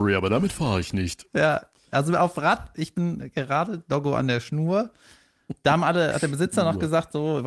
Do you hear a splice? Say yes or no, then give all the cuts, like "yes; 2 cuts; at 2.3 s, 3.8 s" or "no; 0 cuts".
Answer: no; 0 cuts